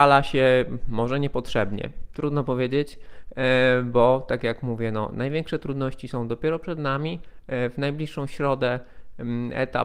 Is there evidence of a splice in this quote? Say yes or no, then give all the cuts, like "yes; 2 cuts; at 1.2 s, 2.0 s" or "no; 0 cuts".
no; 0 cuts